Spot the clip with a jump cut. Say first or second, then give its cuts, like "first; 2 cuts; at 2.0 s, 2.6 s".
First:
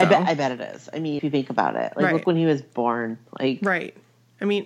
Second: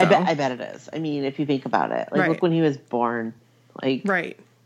first; 2 cuts; at 1.2 s, 3.3 s